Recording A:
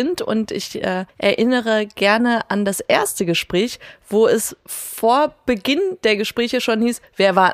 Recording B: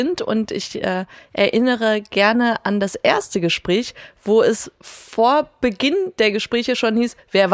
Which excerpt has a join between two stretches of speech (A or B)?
A